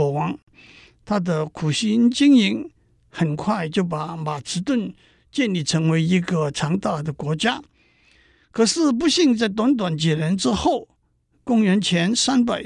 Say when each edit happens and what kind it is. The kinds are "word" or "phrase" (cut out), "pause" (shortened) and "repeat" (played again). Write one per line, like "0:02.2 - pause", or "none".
none